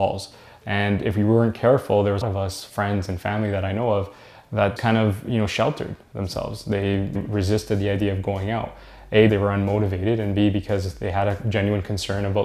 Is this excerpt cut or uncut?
cut